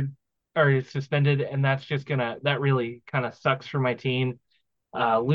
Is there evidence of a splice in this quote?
no; 0 cuts

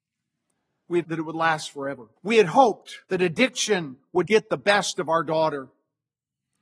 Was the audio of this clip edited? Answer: yes; 4 cuts; at 1.0 s, 2.2 s, 3.0 s, 4.3 s

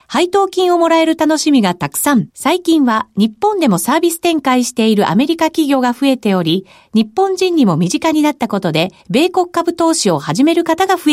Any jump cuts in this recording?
yes; 2 cuts; at 2.3 s, 9.0 s

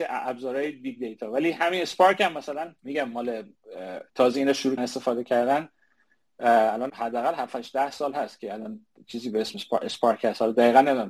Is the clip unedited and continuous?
no; 4 cuts; at 2.8 s, 4.1 s, 4.8 s, 6.9 s

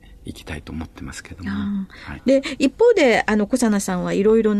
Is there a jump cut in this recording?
no; 0 cuts

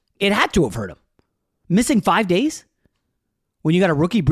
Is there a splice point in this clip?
no; 0 cuts

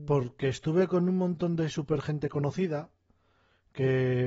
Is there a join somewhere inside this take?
no; 0 cuts

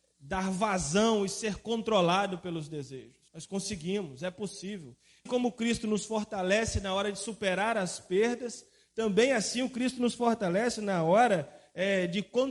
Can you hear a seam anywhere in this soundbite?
yes; 2 cuts; at 3.3 s, 5.3 s

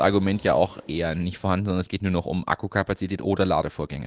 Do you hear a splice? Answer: yes; 1 cut; at 2.0 s

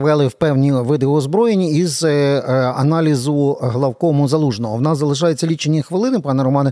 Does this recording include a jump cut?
no; 0 cuts

